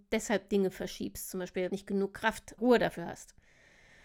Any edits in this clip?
yes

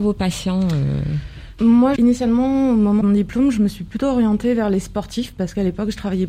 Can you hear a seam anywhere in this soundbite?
yes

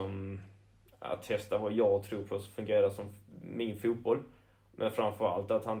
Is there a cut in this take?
no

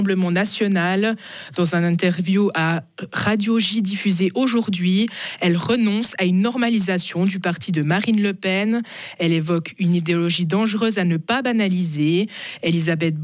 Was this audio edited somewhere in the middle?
no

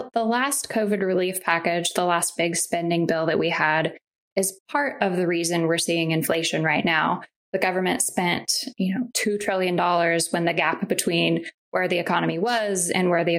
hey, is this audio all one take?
yes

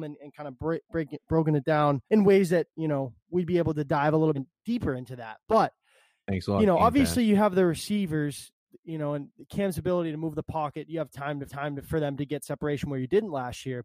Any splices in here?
yes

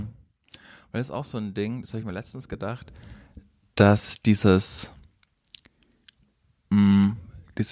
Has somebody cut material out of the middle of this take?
no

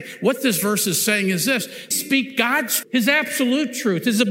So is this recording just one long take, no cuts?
no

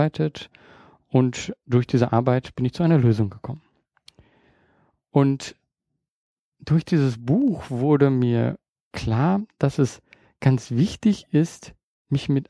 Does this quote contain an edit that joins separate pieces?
no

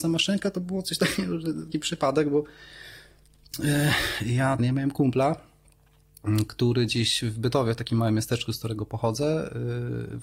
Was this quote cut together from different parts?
yes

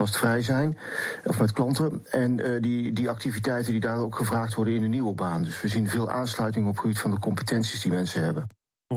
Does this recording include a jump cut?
no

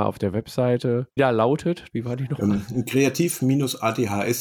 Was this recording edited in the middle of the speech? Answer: yes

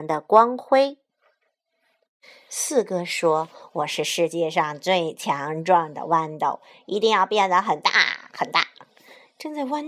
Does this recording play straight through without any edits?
no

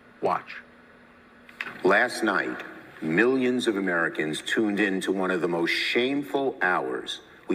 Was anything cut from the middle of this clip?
no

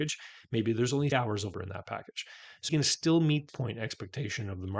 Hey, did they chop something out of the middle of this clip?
yes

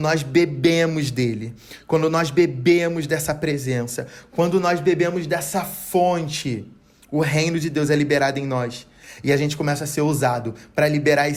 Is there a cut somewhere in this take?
no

